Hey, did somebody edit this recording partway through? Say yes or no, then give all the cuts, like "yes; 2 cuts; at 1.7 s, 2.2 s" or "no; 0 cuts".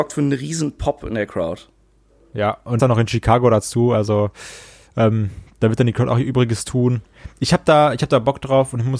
yes; 1 cut; at 2.8 s